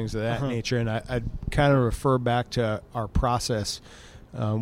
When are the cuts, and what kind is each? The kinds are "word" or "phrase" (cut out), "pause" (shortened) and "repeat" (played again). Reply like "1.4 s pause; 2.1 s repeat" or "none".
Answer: 2.9 s word